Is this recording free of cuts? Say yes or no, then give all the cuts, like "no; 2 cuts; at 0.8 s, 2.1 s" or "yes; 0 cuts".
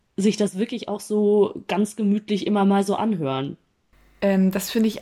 yes; 0 cuts